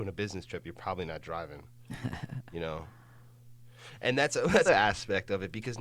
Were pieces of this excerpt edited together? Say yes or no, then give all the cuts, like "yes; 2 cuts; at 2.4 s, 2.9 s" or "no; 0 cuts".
yes; 1 cut; at 4.7 s